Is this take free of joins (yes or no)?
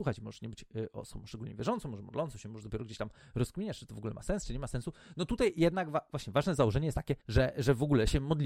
yes